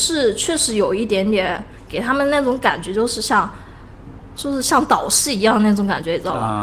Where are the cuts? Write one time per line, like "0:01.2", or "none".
0:04.4